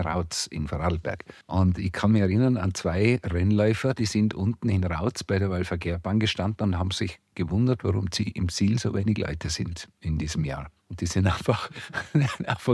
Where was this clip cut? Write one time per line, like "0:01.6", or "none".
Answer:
0:01.4
0:10.8

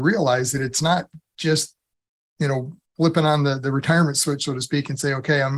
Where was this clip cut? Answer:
0:02.8

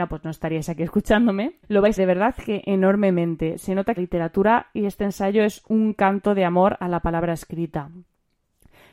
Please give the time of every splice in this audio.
0:01.6
0:02.0
0:04.0

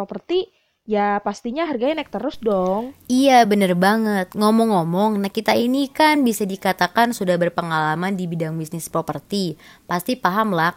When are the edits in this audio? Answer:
none

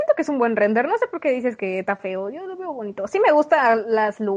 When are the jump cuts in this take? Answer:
none

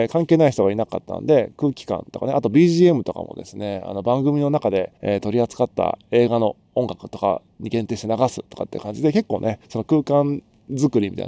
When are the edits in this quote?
0:05.0
0:09.6

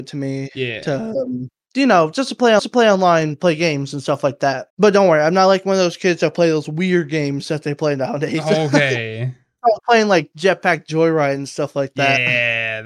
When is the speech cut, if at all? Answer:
0:02.6
0:04.7

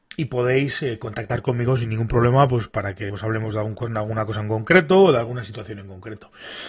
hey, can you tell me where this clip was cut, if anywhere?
0:02.7
0:03.1

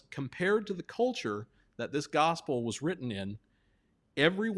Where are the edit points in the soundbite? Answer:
none

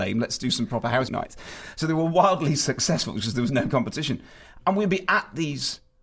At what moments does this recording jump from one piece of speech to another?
0:01.1

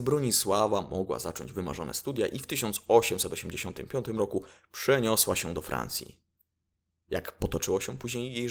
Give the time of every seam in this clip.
none

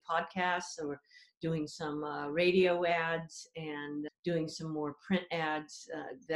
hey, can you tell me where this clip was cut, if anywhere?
0:04.1

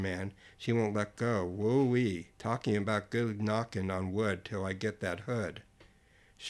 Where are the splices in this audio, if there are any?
0:02.3

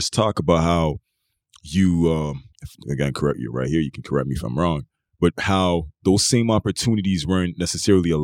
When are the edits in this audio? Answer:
0:02.5

